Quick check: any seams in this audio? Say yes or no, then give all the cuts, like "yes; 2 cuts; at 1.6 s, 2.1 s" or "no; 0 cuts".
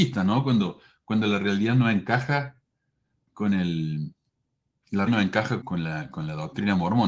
yes; 2 cuts; at 5.1 s, 5.6 s